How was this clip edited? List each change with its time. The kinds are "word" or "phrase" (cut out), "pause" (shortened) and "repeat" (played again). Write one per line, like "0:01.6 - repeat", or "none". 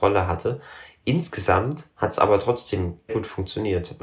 0:01.9 - pause
0:03.1 - word